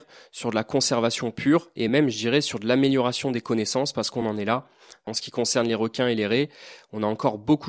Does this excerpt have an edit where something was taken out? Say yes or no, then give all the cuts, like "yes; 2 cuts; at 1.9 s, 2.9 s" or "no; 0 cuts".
no; 0 cuts